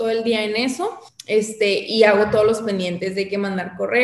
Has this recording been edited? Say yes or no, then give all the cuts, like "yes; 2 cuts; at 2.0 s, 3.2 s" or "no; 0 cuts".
yes; 1 cut; at 1.1 s